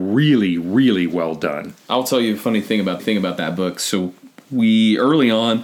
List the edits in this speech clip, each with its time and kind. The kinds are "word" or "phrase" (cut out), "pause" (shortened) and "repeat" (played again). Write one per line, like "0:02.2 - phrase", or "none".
0:03.0 - repeat